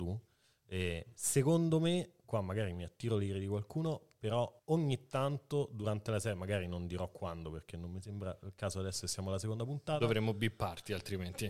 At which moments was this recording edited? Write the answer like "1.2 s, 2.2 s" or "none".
4.6 s